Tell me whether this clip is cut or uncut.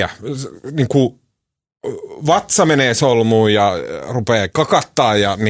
uncut